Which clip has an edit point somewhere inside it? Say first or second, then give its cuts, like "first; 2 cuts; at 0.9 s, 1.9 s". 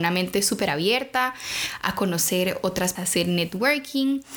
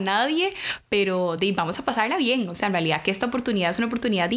first; 1 cut; at 3.0 s